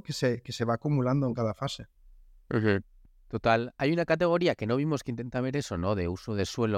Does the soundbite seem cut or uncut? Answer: cut